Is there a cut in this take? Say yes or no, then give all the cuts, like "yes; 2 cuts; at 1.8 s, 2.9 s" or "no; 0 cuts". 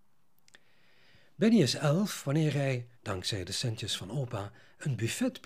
yes; 1 cut; at 2.9 s